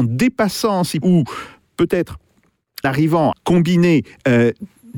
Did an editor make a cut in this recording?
yes; 3 cuts; at 1.0 s, 2.8 s, 3.3 s

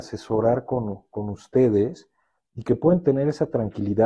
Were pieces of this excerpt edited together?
no; 0 cuts

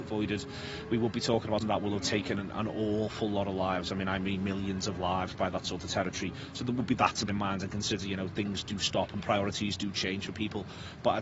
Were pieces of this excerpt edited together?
yes; 2 cuts; at 1.6 s, 7.3 s

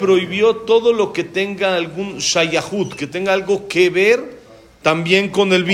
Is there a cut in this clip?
no; 0 cuts

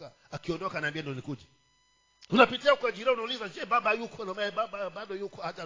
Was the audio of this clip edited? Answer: no; 0 cuts

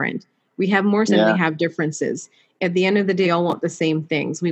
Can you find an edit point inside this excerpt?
yes; 2 cuts; at 1.1 s, 3.2 s

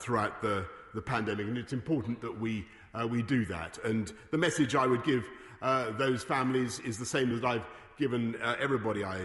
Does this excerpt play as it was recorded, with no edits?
yes; 0 cuts

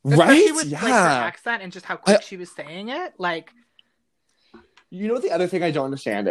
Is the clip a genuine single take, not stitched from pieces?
yes; 0 cuts

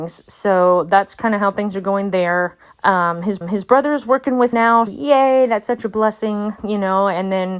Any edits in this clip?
yes; 4 cuts; at 2.7 s, 3.4 s, 4.5 s, 4.9 s

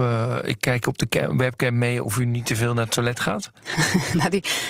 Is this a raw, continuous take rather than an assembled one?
yes; 0 cuts

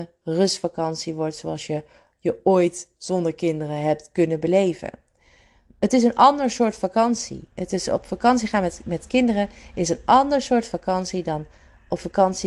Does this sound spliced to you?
no; 0 cuts

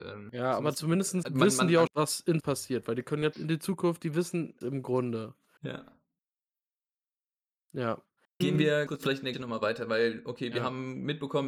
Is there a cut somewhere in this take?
yes; 8 cuts; at 1.2 s, 1.9 s, 2.4 s, 3.3 s, 4.6 s, 8.4 s, 8.9 s, 9.3 s

